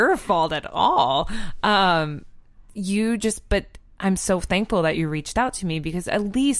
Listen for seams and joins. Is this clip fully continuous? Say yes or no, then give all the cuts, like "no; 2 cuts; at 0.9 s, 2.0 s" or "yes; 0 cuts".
yes; 0 cuts